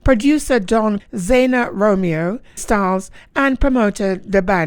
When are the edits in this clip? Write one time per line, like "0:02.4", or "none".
0:01.0
0:02.6